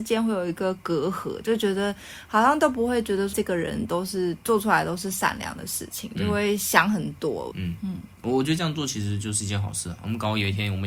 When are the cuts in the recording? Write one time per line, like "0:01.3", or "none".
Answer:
0:03.3
0:07.5